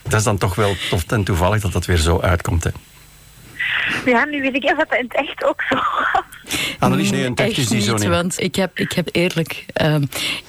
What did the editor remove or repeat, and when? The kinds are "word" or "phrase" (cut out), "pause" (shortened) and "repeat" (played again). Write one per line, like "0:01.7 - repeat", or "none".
0:01.1 - word
0:04.6 - word
0:07.1 - word
0:08.4 - word
0:08.8 - word
0:09.1 - word